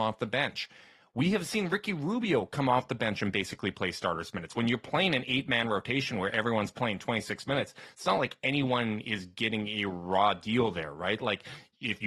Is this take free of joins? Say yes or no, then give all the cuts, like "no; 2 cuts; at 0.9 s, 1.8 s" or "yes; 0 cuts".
yes; 0 cuts